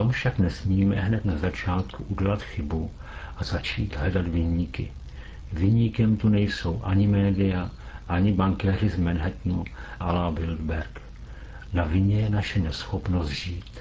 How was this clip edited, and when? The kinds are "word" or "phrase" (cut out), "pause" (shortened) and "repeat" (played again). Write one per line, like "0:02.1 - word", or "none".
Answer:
0:10.0 - phrase

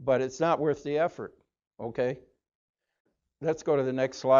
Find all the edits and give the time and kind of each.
none

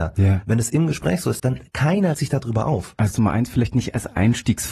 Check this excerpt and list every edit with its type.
0:01.4 - phrase
0:02.1 - word
0:03.1 - word

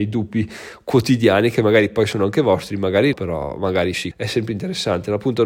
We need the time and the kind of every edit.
0:03.1 - word
0:04.1 - word

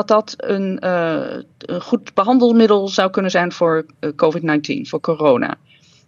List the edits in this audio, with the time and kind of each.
none

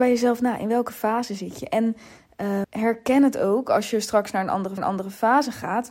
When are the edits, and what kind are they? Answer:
0:02.6 - word
0:04.8 - repeat

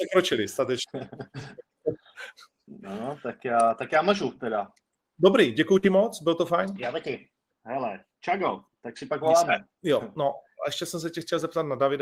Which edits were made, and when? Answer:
0:09.7 - pause

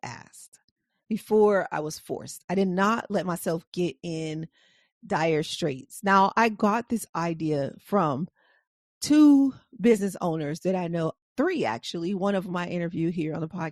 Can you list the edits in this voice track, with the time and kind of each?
none

